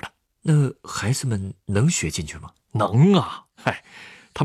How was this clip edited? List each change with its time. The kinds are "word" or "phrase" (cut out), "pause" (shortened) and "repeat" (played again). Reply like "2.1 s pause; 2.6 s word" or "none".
1.6 s pause; 2.6 s pause; 3.5 s pause